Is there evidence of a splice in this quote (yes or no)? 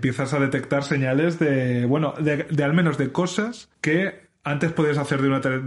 yes